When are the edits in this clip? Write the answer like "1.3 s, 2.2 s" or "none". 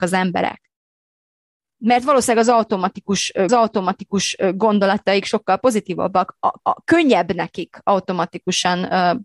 3.5 s, 6.6 s